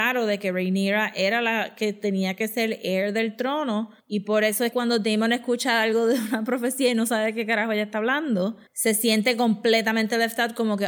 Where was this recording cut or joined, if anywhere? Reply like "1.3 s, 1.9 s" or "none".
4.0 s, 4.7 s, 8.7 s